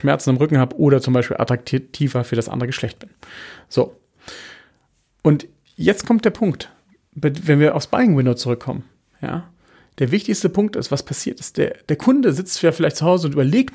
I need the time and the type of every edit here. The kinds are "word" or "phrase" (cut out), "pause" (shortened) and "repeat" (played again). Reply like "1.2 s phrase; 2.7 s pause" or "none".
none